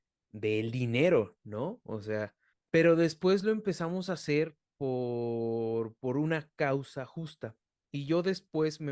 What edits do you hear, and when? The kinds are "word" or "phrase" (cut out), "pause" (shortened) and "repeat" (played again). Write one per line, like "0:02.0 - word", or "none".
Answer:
0:02.5 - pause